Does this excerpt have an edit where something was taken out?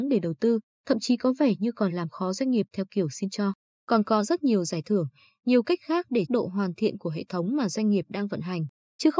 yes; 1 cut; at 6.3 s

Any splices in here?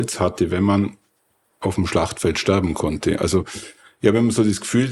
no; 0 cuts

